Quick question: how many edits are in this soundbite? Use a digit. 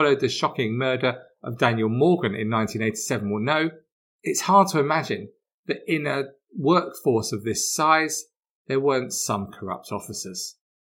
0